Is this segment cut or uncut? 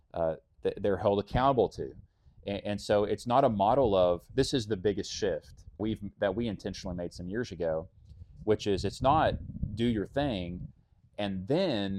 cut